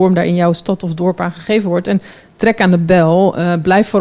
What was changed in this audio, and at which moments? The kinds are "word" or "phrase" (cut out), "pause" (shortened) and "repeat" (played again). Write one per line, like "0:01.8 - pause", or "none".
none

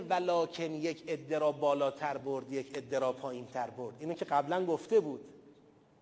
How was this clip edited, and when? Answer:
none

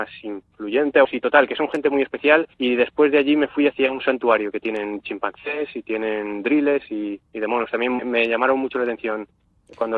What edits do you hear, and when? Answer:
0:01.0 - word
0:02.5 - pause
0:08.0 - word

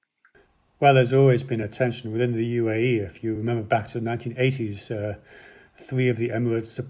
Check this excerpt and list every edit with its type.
none

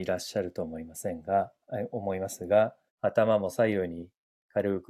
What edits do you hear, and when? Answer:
0:02.9 - pause

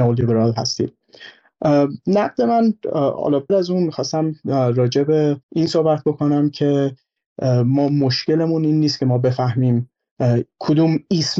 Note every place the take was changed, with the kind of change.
0:03.5 - word
0:05.4 - pause

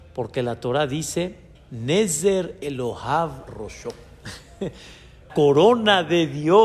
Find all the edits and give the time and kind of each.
0:01.5 - word
0:03.5 - word
0:05.3 - word

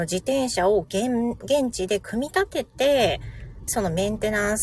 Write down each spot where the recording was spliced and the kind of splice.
0:03.7 - word

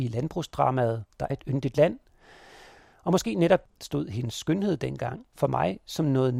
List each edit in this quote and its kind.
0:01.3 - word
0:03.7 - word
0:05.3 - pause

